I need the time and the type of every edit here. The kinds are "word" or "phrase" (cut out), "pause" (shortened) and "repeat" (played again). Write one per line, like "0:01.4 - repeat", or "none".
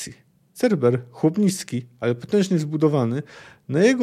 none